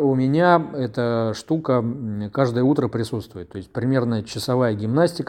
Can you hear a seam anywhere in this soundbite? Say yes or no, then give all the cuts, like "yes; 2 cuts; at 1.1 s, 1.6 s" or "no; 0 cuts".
no; 0 cuts